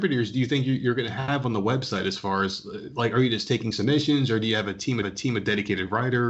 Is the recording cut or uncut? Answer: cut